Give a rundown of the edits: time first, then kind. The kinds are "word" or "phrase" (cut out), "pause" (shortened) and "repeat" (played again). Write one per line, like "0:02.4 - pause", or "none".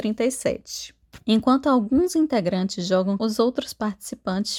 0:01.2 - pause
0:03.2 - word